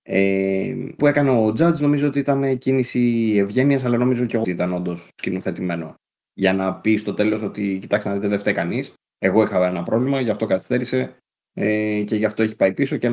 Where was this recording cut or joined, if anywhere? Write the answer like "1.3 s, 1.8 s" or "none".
1.0 s, 4.4 s